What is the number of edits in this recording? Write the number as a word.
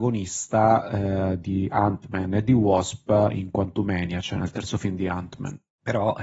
zero